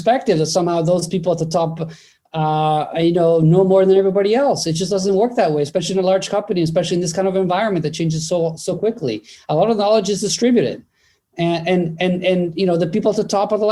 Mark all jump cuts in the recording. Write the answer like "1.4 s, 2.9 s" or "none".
none